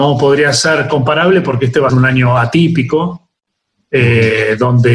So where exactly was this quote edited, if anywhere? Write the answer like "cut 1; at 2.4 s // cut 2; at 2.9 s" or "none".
cut 1; at 1.9 s